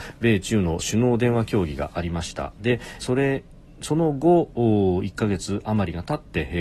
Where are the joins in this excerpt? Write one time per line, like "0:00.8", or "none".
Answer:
0:03.0